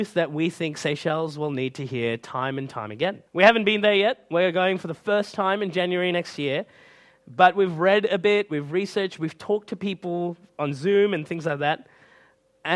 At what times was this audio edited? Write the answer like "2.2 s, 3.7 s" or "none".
3.3 s